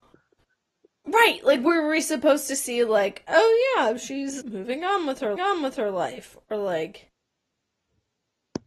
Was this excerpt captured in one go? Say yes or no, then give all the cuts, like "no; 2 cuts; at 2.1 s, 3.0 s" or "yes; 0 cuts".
no; 2 cuts; at 4.4 s, 5.4 s